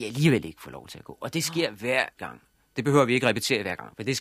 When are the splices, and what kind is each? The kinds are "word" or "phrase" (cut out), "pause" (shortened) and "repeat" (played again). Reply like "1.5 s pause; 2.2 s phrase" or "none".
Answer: 2.2 s word